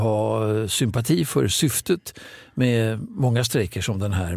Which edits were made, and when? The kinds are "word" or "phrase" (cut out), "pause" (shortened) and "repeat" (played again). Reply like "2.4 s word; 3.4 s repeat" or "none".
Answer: none